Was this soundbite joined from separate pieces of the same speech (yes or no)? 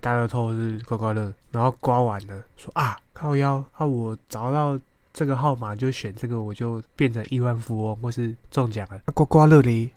yes